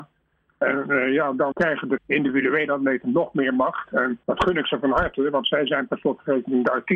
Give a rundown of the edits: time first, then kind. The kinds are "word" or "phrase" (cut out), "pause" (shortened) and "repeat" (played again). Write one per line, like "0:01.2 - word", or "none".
0:01.5 - word
0:02.0 - word
0:04.2 - pause